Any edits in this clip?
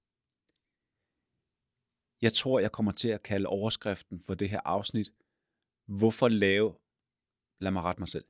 no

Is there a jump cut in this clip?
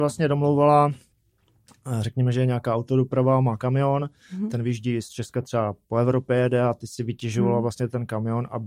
no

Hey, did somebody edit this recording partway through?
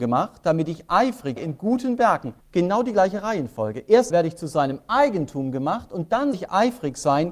yes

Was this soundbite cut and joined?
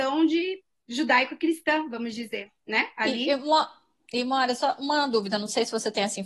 no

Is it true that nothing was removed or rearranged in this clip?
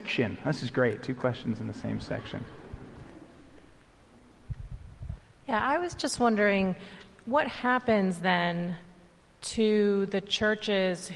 yes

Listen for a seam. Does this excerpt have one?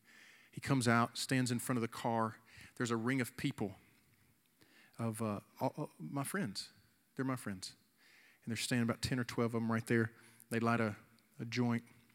no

